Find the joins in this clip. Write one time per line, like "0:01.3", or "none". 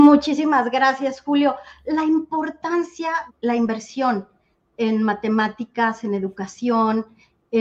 0:03.3